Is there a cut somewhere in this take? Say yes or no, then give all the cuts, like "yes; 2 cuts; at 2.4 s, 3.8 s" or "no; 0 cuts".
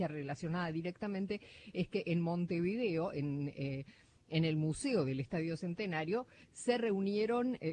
no; 0 cuts